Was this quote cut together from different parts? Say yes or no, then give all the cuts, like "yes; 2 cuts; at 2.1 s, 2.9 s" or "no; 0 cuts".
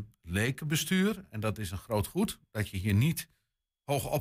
no; 0 cuts